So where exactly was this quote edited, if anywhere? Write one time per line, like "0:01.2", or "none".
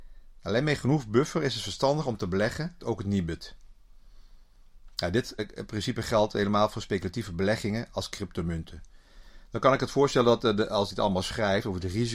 0:02.8
0:05.4
0:10.9

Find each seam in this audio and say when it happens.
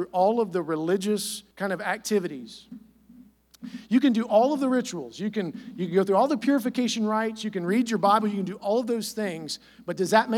0:01.5

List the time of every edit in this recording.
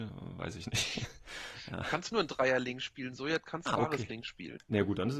0:02.1
0:03.7

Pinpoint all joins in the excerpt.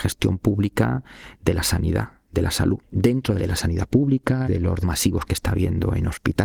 0:02.9
0:03.4
0:04.4
0:04.8

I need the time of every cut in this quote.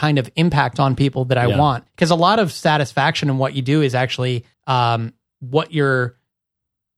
0:01.9
0:04.5

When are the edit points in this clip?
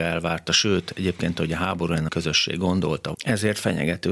0:02.1
0:03.1

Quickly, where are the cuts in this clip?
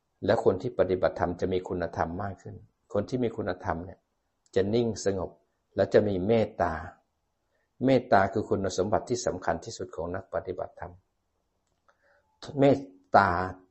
none

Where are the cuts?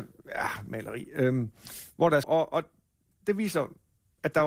0:02.2

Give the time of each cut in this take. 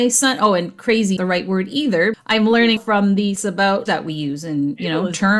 0:01.2
0:02.1
0:02.8
0:03.4
0:03.9

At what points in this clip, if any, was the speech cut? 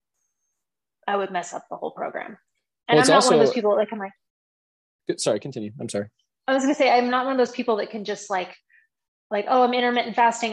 none

